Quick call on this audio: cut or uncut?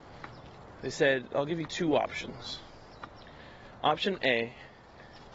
uncut